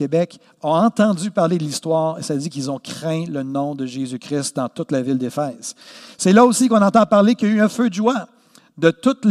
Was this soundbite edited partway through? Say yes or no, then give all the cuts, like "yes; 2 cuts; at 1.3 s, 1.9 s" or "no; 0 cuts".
no; 0 cuts